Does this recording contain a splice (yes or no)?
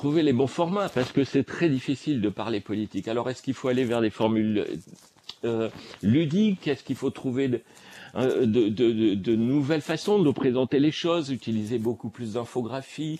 no